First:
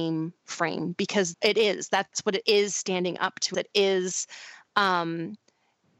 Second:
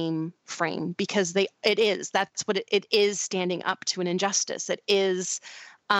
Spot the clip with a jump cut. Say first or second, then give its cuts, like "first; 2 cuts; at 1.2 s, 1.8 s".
first; 3 cuts; at 1.3 s, 2.4 s, 3.5 s